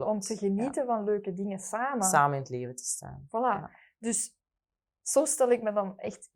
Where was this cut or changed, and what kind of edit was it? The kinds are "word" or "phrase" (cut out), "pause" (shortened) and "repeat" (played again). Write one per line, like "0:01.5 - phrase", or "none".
none